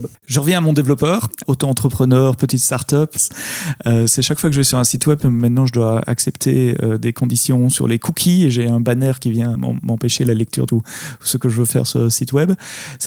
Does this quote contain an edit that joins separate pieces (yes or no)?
yes